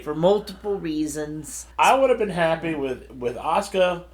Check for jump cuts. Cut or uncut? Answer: cut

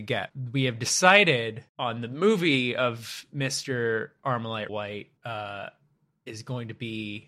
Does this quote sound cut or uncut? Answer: cut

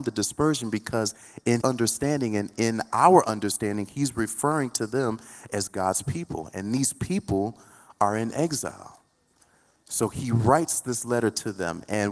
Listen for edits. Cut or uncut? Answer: cut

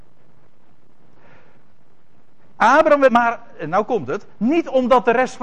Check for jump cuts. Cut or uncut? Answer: cut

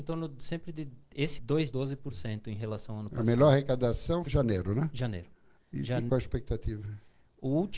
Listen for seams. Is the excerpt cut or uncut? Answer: cut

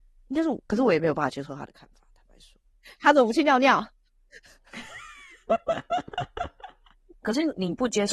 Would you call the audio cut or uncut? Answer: cut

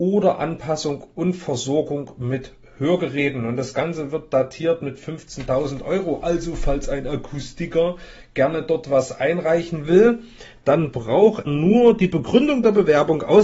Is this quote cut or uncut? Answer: cut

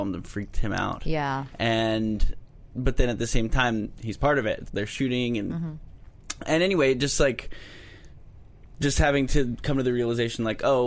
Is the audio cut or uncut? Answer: cut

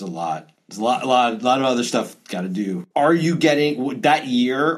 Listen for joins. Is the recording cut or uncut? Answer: cut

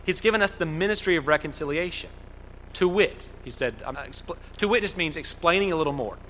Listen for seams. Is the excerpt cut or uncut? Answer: cut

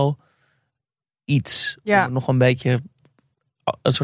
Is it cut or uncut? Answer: uncut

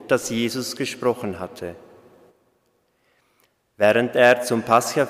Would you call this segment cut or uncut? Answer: uncut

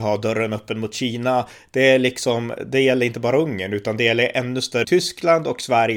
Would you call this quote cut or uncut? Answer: cut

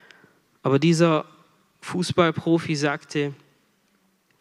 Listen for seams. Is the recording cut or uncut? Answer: uncut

